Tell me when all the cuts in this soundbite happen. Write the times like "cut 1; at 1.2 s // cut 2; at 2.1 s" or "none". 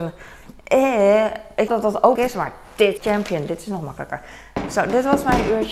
cut 1; at 1.7 s // cut 2; at 2.2 s // cut 3; at 3.0 s